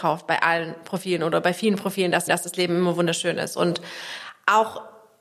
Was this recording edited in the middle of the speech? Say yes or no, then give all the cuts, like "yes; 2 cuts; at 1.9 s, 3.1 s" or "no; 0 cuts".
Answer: yes; 1 cut; at 2.3 s